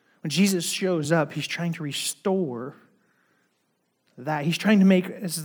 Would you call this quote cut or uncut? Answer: uncut